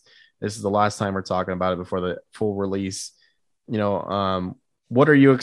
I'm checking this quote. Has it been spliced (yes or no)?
no